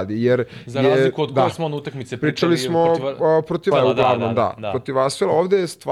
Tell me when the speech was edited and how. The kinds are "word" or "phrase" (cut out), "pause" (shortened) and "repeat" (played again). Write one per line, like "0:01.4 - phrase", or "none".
0:03.7 - word